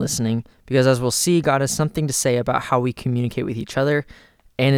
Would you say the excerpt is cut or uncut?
uncut